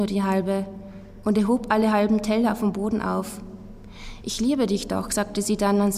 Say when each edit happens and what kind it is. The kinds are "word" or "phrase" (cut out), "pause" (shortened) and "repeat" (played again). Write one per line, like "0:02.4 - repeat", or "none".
none